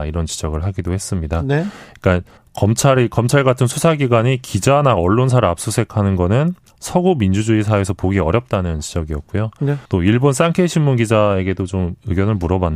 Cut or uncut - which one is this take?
cut